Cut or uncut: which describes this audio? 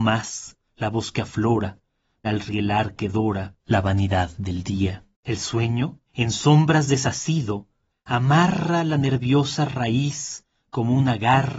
cut